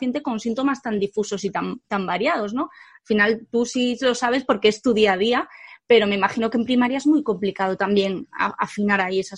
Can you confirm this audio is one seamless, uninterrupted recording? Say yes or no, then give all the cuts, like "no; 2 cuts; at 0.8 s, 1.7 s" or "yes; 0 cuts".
yes; 0 cuts